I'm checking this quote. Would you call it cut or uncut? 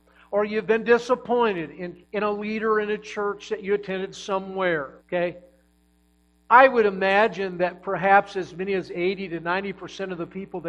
cut